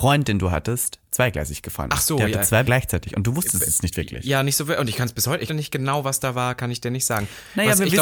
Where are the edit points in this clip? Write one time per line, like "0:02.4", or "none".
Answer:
0:02.6
0:05.5